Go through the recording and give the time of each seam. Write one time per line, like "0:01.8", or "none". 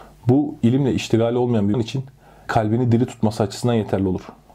0:01.7
0:02.5